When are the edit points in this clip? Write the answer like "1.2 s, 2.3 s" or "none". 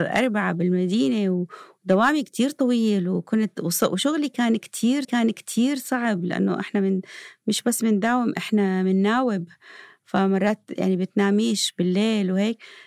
5.0 s